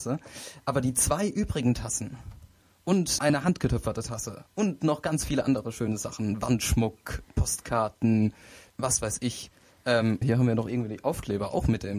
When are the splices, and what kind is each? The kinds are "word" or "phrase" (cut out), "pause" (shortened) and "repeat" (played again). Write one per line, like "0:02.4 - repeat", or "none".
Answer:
0:03.2 - word
0:08.7 - word
0:10.2 - word